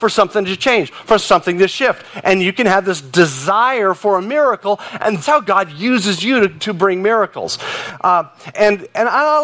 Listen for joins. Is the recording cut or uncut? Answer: cut